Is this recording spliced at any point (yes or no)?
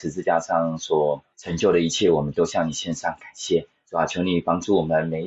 yes